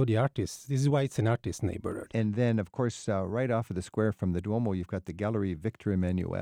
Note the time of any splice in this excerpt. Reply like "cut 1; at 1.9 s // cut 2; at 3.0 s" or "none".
none